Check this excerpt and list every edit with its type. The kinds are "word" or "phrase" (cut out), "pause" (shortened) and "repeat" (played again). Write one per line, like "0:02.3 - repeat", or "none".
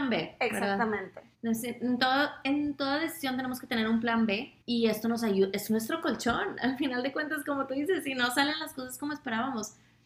0:01.3 - pause
0:04.6 - pause

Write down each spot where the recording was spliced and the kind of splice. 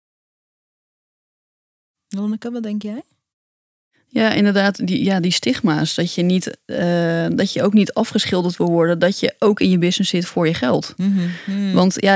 none

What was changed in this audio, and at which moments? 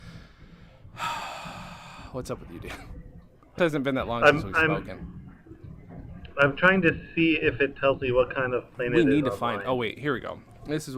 0:03.6 - word

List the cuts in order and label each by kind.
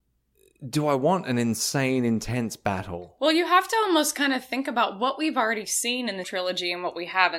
0:06.2 - word

